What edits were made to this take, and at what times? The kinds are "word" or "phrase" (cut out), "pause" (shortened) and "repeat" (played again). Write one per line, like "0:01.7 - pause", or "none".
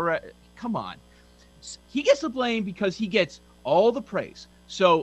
0:01.8 - pause

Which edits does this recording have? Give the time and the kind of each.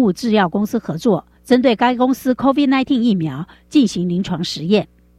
0:01.3 - pause

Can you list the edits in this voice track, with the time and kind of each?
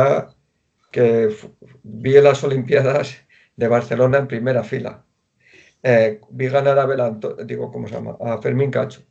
none

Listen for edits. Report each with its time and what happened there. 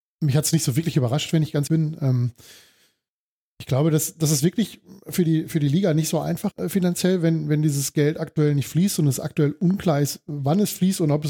0:01.7 - word
0:06.5 - word

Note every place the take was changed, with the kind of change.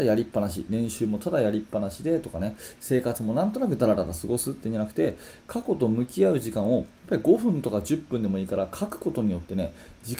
none

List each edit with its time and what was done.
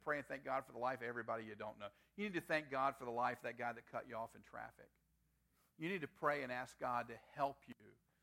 none

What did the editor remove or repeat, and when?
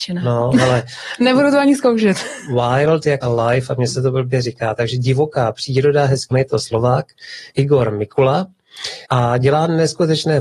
0:03.2 - word
0:06.3 - phrase
0:07.5 - pause
0:09.0 - pause

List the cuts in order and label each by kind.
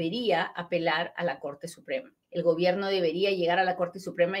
0:02.2 - pause

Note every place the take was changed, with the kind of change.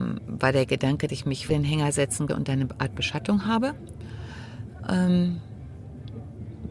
0:01.1 - word
0:01.5 - word
0:02.3 - word

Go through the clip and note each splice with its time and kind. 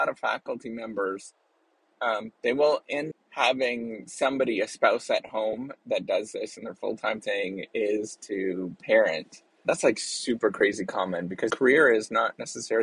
0:02.3 - pause
0:03.1 - word
0:09.6 - word
0:11.5 - word

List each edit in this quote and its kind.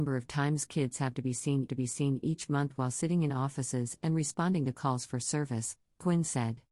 0:01.7 - repeat

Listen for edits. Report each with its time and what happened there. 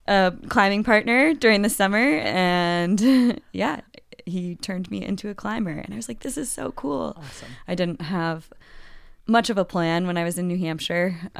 0:09.2 - pause

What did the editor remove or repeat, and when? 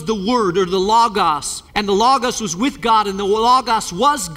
0:01.7 - pause

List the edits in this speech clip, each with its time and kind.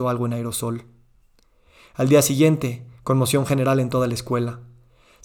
none

